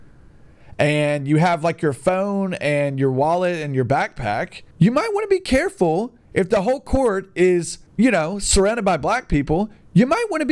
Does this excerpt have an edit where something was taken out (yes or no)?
yes